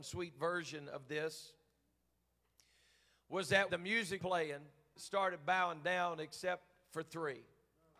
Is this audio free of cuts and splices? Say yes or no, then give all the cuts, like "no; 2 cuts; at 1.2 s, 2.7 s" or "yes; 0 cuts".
no; 3 cuts; at 3.7 s, 4.2 s, 5.0 s